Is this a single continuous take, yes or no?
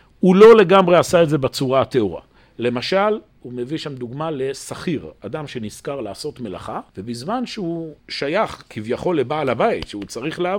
no